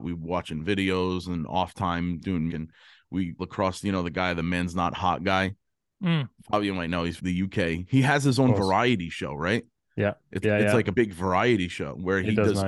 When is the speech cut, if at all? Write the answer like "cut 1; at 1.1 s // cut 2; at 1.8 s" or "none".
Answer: cut 1; at 2.5 s // cut 2; at 3.4 s // cut 3; at 7.2 s // cut 4; at 10.4 s // cut 5; at 10.9 s

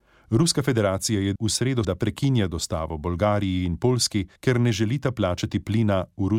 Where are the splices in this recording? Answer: cut 1; at 1.4 s // cut 2; at 1.8 s // cut 3; at 4.4 s

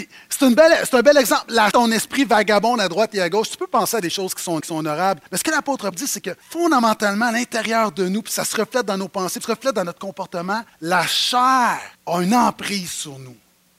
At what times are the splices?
cut 1; at 1.7 s // cut 2; at 4.6 s // cut 3; at 5.3 s // cut 4; at 5.9 s // cut 5; at 6.4 s // cut 6; at 9.4 s // cut 7; at 10.7 s // cut 8; at 11.9 s

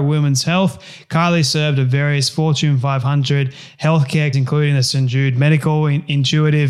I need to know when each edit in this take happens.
cut 1; at 4.3 s

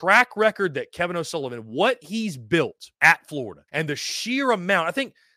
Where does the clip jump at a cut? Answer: cut 1; at 2.9 s // cut 2; at 3.7 s

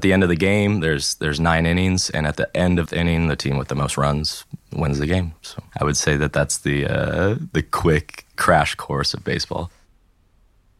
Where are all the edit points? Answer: cut 1; at 2.9 s // cut 2; at 5.7 s

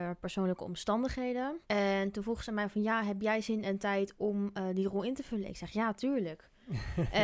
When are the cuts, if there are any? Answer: cut 1; at 1.6 s

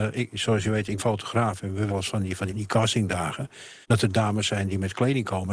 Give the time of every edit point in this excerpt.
cut 1; at 1.0 s // cut 2; at 1.9 s // cut 3; at 2.5 s // cut 4; at 3.8 s

